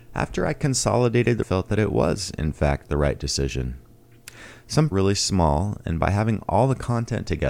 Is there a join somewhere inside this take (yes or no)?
yes